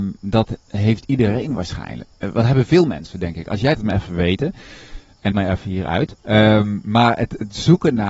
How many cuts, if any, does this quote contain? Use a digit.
3